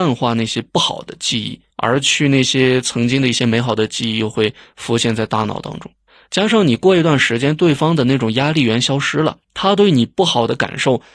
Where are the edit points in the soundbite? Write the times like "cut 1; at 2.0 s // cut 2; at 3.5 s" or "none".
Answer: cut 1; at 1.7 s // cut 2; at 6.1 s // cut 3; at 9.4 s

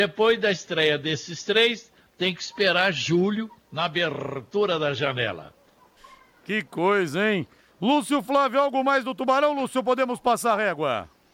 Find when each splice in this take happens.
none

